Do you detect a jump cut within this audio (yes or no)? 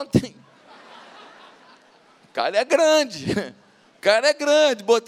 no